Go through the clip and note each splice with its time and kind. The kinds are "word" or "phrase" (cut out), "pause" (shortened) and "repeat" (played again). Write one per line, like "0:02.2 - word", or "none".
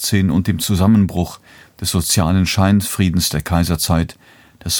none